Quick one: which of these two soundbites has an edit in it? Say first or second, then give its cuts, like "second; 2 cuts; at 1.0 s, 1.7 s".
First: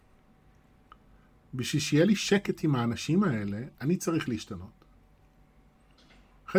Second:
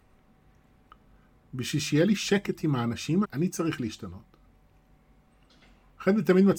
second; 1 cut; at 3.2 s